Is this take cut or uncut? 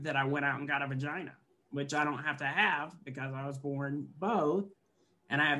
uncut